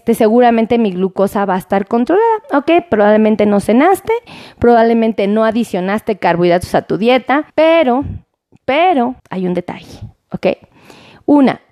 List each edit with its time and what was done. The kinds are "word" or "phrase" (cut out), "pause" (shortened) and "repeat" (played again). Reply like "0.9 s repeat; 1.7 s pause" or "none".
7.5 s pause; 9.2 s pause